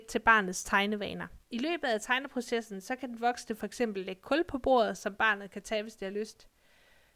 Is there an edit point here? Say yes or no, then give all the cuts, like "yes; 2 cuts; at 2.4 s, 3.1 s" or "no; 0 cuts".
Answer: yes; 1 cut; at 1.4 s